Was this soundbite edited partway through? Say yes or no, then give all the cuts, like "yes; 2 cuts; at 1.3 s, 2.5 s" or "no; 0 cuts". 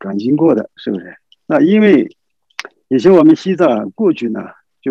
no; 0 cuts